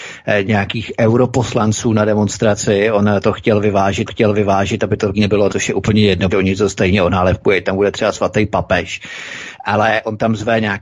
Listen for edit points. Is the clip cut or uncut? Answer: cut